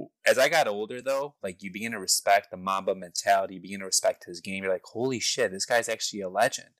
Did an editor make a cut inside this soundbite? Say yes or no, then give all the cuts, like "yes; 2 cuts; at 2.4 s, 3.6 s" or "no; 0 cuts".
no; 0 cuts